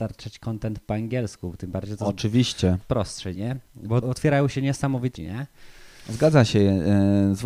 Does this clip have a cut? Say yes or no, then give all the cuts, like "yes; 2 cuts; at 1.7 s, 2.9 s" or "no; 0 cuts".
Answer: yes; 4 cuts; at 2.8 s, 3.4 s, 4.0 s, 5.2 s